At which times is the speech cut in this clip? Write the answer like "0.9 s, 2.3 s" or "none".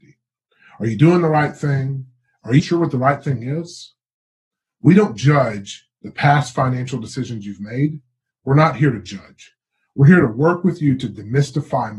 2.6 s